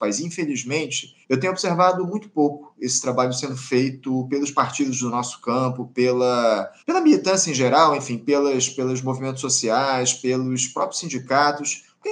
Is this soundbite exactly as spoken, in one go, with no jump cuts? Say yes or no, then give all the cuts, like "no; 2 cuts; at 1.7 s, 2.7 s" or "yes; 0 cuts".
no; 2 cuts; at 1.2 s, 6.8 s